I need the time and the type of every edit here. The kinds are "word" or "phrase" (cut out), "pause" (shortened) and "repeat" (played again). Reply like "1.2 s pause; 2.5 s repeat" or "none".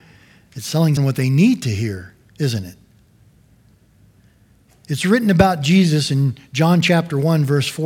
1.0 s word